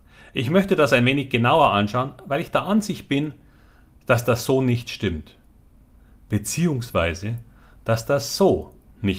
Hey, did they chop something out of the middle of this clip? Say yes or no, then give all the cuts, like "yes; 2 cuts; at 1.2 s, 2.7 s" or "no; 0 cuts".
no; 0 cuts